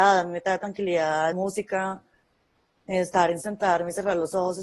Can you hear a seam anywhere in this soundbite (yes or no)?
yes